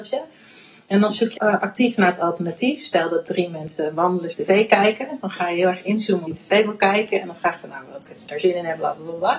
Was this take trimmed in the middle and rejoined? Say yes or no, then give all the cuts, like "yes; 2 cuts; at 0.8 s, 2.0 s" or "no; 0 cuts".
yes; 4 cuts; at 1.4 s, 4.3 s, 6.3 s, 8.0 s